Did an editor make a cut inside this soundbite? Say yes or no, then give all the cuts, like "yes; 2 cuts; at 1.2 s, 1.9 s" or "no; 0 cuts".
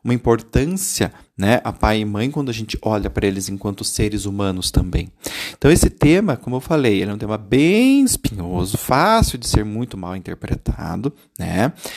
no; 0 cuts